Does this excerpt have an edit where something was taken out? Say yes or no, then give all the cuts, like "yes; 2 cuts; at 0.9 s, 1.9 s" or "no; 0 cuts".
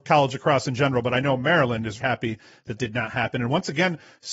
yes; 2 cuts; at 2.0 s, 2.8 s